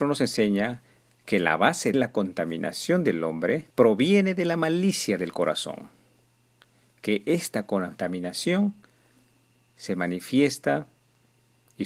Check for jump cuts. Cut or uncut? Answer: cut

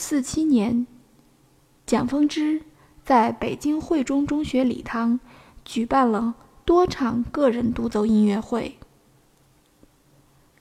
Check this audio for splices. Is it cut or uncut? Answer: uncut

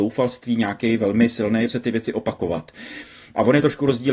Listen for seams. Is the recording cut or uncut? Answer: cut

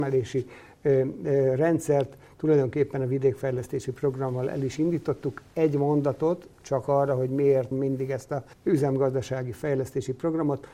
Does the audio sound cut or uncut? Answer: cut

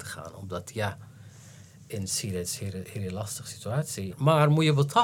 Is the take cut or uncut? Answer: uncut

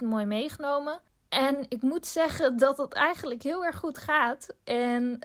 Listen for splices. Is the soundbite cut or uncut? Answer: uncut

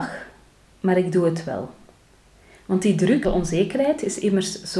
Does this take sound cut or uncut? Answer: cut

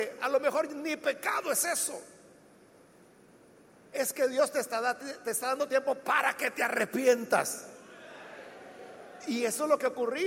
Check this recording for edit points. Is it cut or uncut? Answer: uncut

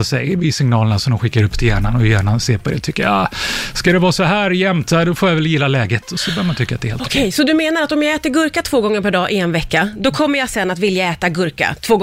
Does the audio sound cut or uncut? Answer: uncut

